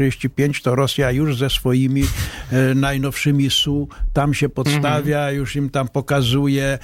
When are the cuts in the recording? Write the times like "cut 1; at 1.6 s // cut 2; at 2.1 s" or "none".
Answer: none